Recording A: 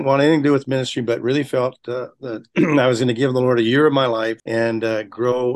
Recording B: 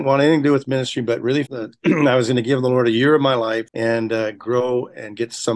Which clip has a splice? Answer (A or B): B